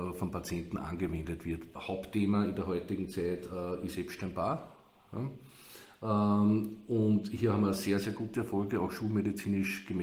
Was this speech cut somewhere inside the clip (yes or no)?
no